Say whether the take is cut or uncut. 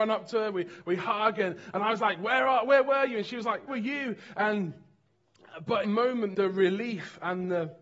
cut